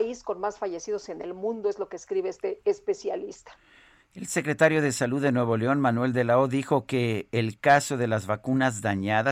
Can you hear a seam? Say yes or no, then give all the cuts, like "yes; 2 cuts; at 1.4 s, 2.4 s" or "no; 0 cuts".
no; 0 cuts